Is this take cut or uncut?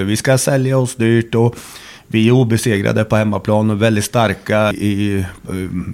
cut